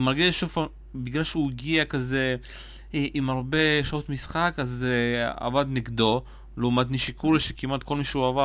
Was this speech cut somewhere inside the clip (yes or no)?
no